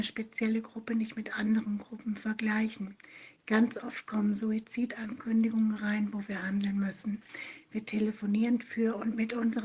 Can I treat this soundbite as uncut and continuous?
yes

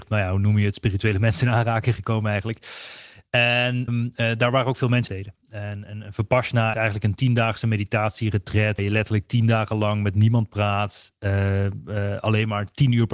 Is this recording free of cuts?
no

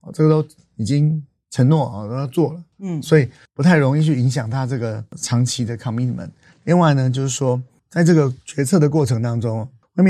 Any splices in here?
no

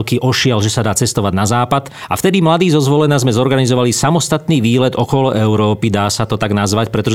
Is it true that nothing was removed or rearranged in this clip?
yes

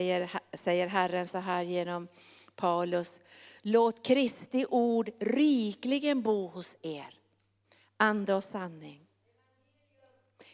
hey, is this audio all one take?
yes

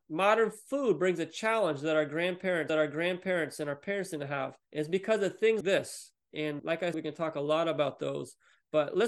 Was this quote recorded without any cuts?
no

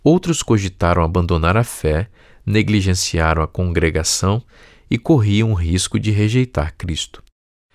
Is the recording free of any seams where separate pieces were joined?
yes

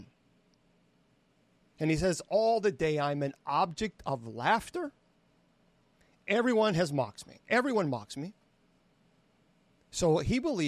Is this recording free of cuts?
yes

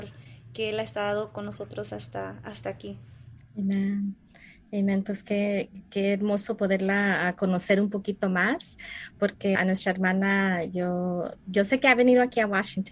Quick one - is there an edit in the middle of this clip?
yes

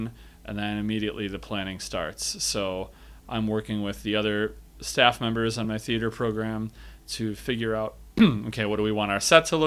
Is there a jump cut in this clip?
no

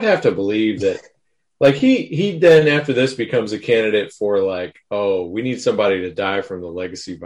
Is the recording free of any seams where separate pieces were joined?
yes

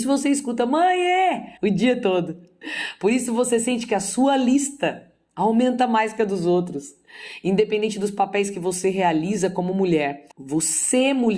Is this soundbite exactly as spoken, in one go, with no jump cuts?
no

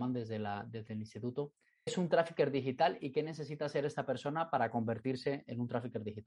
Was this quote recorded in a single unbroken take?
no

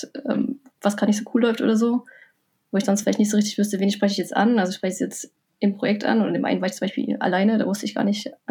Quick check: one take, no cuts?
yes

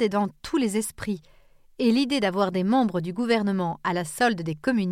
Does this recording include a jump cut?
no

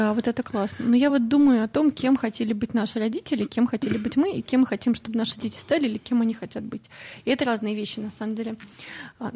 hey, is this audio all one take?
yes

